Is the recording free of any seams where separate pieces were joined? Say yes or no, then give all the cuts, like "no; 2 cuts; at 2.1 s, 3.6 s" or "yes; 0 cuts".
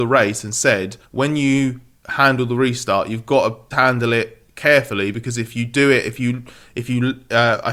no; 2 cuts; at 1.0 s, 3.7 s